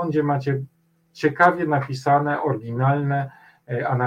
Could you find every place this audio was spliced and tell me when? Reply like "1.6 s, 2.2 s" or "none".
none